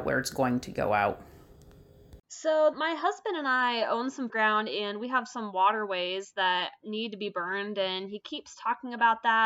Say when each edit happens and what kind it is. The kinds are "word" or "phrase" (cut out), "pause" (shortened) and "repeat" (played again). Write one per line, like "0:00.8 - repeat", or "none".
0:02.7 - word
0:04.3 - word